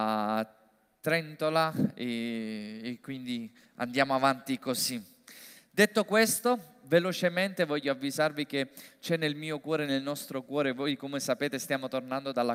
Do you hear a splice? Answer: no; 0 cuts

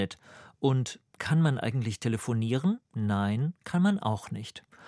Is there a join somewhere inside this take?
yes; 1 cut; at 2.8 s

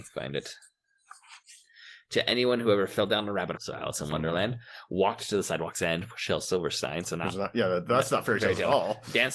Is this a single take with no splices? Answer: no; 1 cut; at 3.6 s

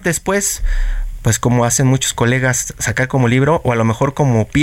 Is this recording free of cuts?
yes; 0 cuts

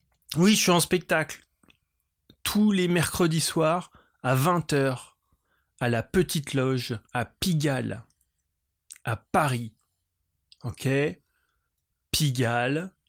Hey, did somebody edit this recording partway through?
yes; 1 cut; at 7.1 s

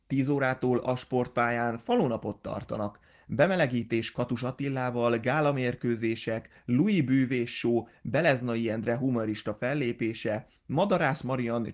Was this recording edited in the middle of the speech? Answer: no; 0 cuts

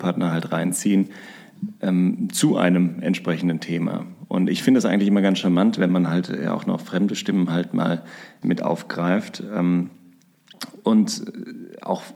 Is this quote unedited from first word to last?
no; 1 cut; at 8.4 s

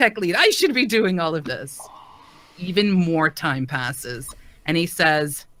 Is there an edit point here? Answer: no; 0 cuts

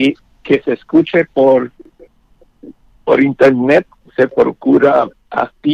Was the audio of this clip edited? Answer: no; 0 cuts

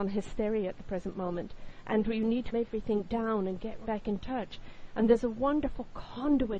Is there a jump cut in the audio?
yes; 2 cuts; at 2.5 s, 3.8 s

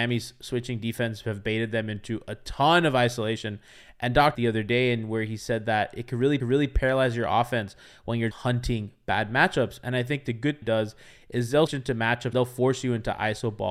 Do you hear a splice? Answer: yes; 6 cuts; at 4.3 s, 6.4 s, 8.3 s, 10.6 s, 11.7 s, 12.3 s

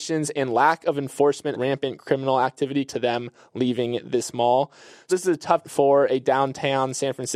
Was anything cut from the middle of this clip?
yes; 4 cuts; at 1.5 s, 2.9 s, 5.1 s, 5.6 s

